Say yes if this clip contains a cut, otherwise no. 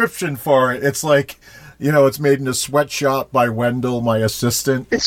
no